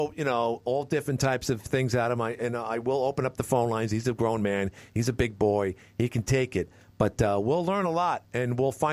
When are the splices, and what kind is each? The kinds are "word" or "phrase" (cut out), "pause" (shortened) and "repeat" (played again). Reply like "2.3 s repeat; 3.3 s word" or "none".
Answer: none